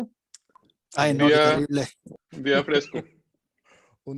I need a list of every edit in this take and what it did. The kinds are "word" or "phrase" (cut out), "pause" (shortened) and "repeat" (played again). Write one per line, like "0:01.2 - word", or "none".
none